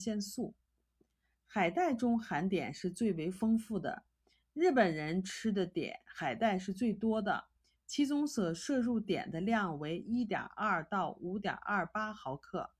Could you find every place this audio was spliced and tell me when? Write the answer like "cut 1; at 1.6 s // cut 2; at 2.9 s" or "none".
none